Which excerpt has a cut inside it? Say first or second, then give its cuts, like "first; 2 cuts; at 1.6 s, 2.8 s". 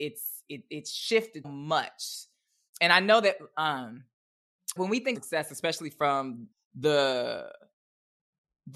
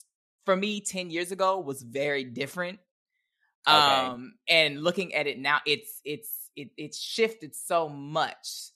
first; 4 cuts; at 1.4 s, 4.8 s, 5.1 s, 6.5 s